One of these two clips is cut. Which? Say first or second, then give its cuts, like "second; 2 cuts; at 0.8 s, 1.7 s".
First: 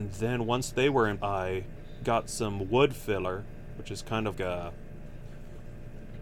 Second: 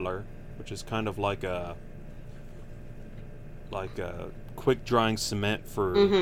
first; 2 cuts; at 1.2 s, 4.3 s